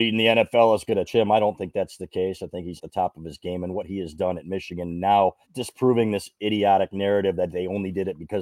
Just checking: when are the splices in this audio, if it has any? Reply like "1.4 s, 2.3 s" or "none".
1.1 s, 2.8 s, 5.4 s